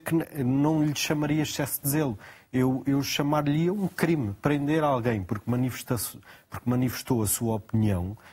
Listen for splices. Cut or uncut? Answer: uncut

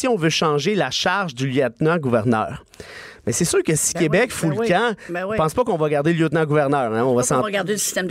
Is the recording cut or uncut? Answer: uncut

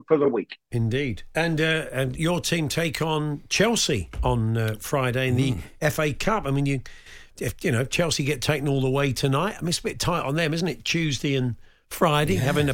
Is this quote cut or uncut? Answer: uncut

